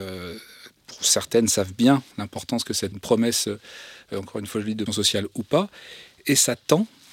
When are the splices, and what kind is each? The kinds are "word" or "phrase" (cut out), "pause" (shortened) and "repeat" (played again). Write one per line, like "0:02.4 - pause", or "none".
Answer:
0:02.1 - pause
0:02.9 - phrase
0:04.9 - word

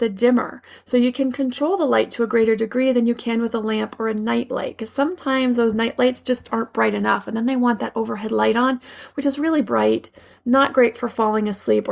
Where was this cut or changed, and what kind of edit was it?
none

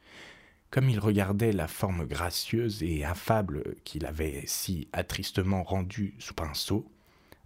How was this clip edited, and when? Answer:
0:06.3 - word

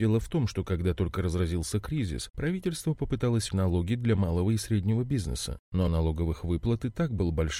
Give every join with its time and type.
0:03.5 - word
0:05.9 - word

